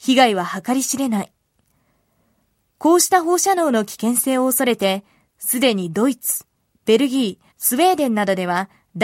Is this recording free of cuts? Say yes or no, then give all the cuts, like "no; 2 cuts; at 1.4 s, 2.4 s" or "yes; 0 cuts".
no; 1 cut; at 7.5 s